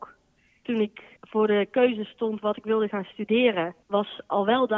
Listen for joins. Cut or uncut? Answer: cut